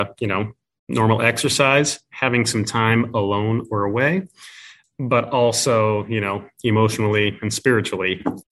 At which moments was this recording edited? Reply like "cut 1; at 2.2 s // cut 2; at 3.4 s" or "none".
none

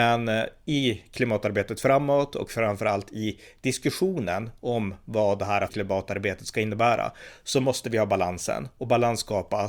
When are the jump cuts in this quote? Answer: cut 1; at 5.7 s

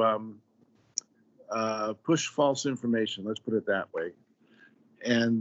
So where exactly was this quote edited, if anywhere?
none

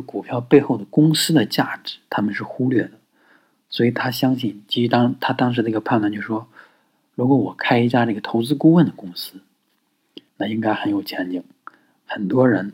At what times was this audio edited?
cut 1; at 10.3 s

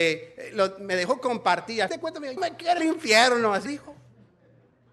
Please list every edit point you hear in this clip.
cut 1; at 1.9 s // cut 2; at 2.4 s // cut 3; at 2.8 s // cut 4; at 3.7 s

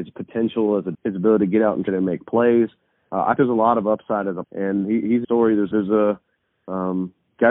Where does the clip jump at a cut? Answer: cut 1; at 0.9 s // cut 2; at 1.9 s // cut 3; at 3.4 s // cut 4; at 4.4 s // cut 5; at 4.8 s // cut 6; at 5.2 s // cut 7; at 5.7 s

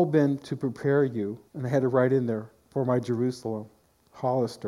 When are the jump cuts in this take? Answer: cut 1; at 1.5 s

